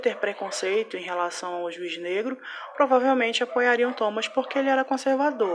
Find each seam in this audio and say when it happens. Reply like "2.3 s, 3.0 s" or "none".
none